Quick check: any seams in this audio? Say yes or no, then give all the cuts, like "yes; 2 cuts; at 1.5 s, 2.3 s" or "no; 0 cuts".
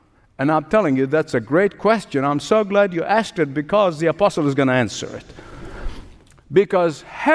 no; 0 cuts